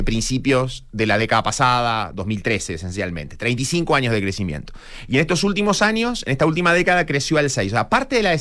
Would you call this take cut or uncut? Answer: uncut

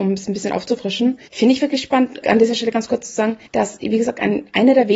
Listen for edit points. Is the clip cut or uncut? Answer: cut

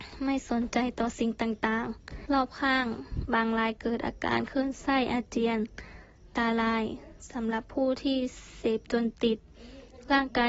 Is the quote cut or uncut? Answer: cut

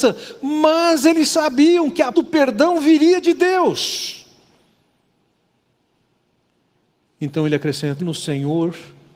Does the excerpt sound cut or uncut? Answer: cut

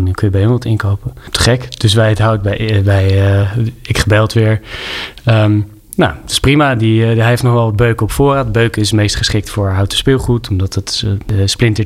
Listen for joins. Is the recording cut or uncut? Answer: uncut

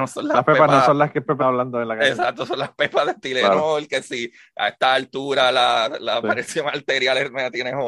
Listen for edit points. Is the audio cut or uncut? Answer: cut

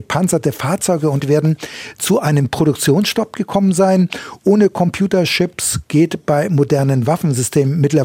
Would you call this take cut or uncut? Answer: cut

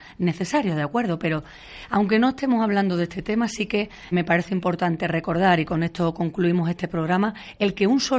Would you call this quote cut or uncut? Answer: cut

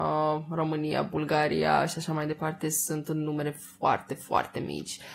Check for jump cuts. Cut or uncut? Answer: uncut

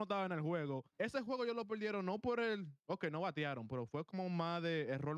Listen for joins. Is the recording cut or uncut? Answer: cut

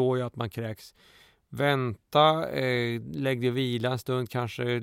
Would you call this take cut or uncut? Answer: uncut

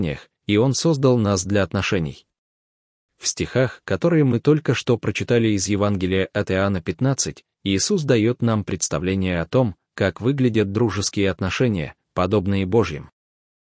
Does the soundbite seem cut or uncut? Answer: uncut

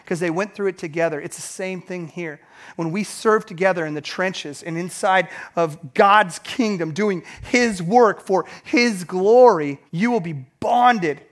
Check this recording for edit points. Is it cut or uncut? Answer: cut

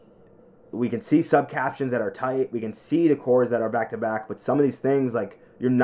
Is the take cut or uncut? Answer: uncut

